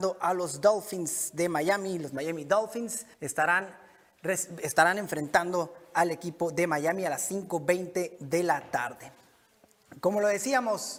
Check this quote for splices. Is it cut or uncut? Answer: cut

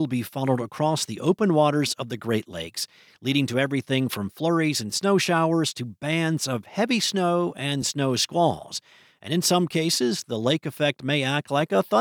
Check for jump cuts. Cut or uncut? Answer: uncut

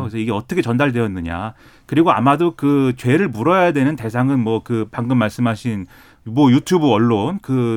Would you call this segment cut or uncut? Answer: uncut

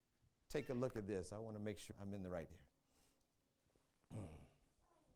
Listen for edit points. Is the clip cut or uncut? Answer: cut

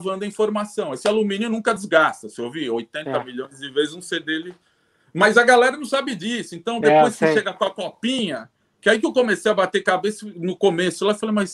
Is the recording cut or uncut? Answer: uncut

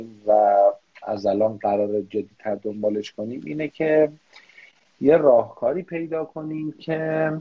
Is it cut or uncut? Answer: uncut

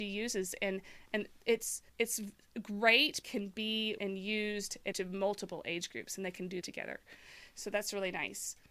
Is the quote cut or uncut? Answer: cut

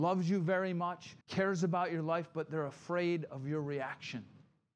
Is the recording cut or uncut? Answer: cut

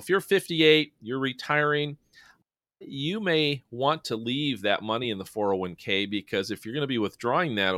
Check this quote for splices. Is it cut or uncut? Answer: uncut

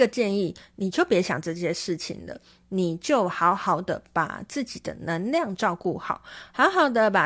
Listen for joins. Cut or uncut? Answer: uncut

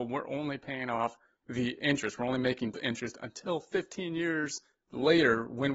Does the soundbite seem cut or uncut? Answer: cut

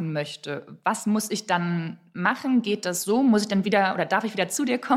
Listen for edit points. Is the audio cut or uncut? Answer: uncut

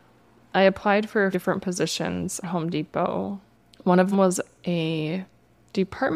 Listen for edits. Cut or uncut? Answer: cut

